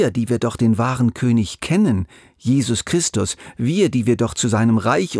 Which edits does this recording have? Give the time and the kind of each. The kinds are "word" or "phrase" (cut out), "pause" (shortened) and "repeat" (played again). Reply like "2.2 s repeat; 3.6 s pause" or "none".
none